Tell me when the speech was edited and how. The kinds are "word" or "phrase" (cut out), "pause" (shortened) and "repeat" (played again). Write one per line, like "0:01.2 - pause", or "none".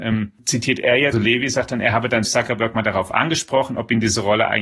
0:01.1 - word
0:02.2 - word